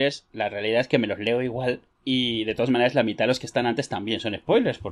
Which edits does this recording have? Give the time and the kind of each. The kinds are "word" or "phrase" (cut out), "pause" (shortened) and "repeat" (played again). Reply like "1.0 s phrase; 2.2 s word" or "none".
1.9 s pause